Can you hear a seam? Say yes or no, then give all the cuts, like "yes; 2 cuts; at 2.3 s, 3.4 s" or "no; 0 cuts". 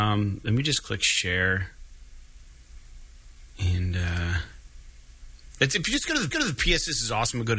yes; 1 cut; at 6.3 s